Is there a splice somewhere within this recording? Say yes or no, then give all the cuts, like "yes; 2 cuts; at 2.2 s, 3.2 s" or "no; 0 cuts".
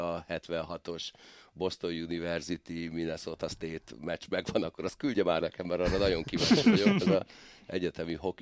yes; 1 cut; at 5.4 s